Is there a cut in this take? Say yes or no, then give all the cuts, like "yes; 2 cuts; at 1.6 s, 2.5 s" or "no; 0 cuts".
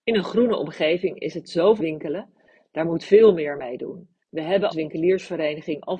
yes; 4 cuts; at 1.8 s, 3.0 s, 4.2 s, 4.7 s